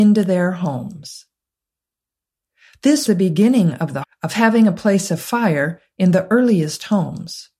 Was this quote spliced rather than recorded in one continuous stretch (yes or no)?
yes